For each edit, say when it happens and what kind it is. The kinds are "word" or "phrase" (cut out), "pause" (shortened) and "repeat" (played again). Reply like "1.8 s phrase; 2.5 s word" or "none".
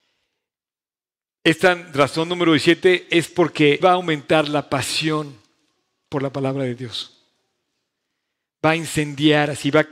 3.8 s word